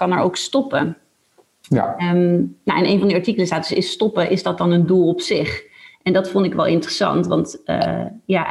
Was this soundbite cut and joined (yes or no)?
no